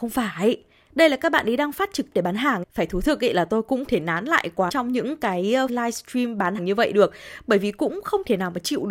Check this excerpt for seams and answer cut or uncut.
cut